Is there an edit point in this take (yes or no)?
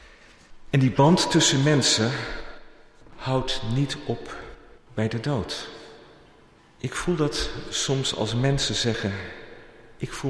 yes